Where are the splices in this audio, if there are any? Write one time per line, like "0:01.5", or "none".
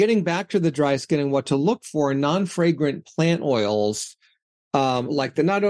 none